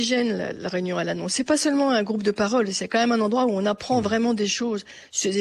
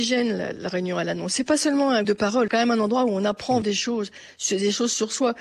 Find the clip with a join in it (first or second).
second